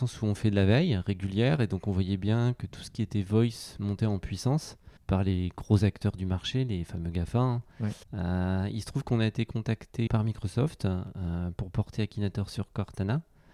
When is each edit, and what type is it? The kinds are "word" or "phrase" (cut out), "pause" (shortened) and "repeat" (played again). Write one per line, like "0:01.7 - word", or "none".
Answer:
0:05.0 - pause
0:08.0 - pause
0:10.1 - word